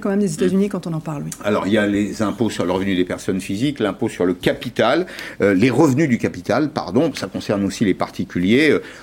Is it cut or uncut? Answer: uncut